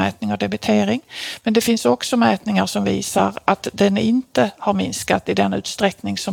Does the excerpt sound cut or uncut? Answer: uncut